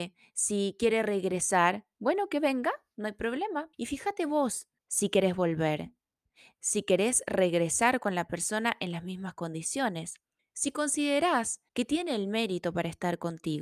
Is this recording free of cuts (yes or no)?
no